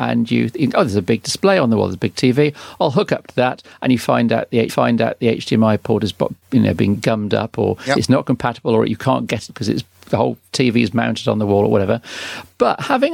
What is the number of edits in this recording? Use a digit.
3